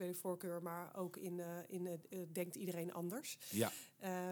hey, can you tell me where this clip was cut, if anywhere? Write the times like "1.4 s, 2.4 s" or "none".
none